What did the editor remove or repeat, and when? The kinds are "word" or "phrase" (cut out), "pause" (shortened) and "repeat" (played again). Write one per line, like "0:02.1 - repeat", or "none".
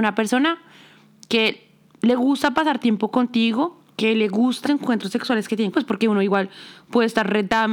0:03.9 - pause
0:04.6 - word
0:05.7 - word